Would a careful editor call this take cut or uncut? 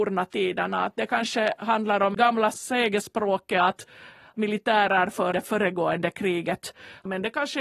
cut